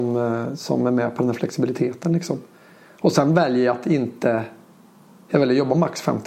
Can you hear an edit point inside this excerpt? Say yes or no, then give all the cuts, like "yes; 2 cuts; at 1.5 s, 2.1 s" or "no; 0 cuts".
no; 0 cuts